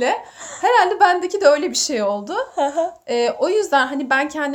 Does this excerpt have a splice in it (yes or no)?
no